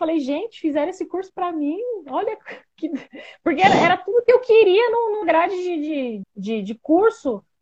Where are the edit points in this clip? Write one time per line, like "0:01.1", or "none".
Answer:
0:05.2
0:06.2